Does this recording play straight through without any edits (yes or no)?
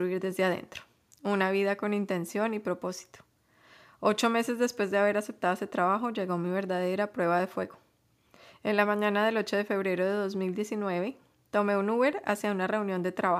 yes